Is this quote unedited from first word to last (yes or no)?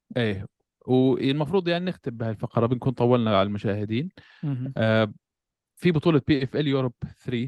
yes